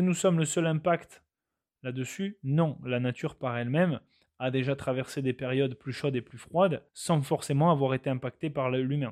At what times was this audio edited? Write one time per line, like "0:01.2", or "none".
0:06.9